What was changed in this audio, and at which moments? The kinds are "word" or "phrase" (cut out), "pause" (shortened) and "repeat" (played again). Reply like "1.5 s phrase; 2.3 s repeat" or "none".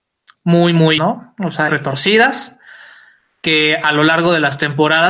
1.0 s phrase; 1.7 s phrase